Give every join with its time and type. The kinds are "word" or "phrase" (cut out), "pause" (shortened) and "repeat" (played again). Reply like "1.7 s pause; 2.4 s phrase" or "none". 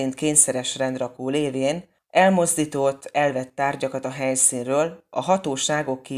none

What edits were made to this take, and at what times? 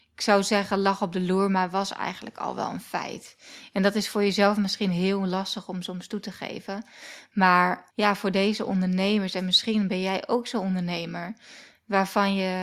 7.9 s pause

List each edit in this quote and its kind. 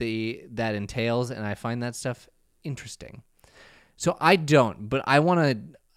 none

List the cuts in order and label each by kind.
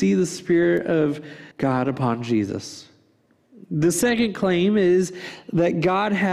1.5 s pause

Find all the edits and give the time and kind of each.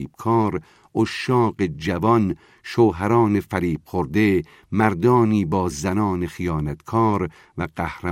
none

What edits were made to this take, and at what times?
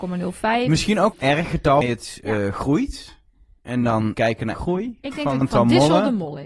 1.1 s word; 1.8 s word; 4.1 s word; 4.5 s word; 5.4 s word

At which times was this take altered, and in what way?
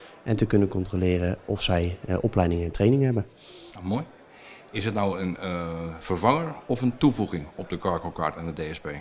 3.7 s pause

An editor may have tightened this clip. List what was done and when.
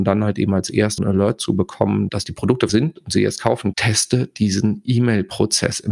1.0 s word; 2.7 s word; 3.7 s word

